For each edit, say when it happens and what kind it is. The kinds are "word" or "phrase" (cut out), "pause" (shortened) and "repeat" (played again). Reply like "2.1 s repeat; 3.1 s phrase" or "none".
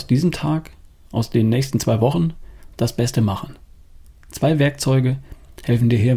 none